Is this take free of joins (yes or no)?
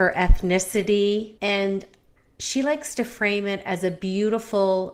no